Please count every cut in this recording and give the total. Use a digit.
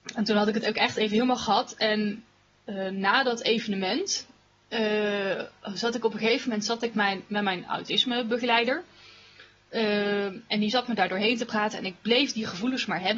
0